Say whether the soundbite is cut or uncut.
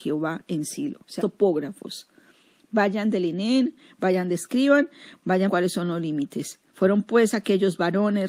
cut